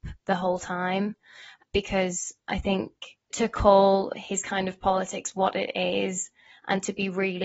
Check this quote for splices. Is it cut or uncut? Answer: uncut